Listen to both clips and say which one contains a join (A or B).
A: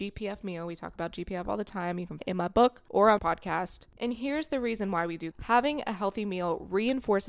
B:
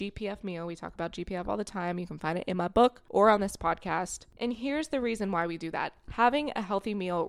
A